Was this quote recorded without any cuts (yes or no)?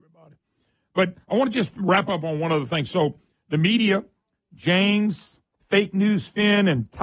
yes